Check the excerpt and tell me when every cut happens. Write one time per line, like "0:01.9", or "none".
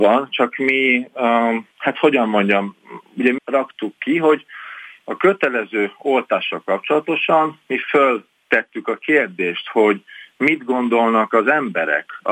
0:01.7
0:03.4